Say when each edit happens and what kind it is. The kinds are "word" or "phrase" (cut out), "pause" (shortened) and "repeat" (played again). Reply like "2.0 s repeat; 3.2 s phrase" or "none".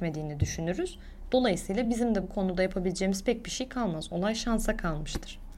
none